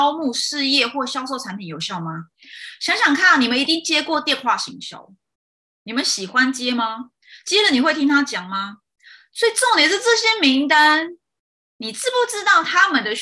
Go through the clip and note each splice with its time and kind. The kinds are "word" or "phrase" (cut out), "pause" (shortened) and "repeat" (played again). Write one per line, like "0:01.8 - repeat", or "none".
none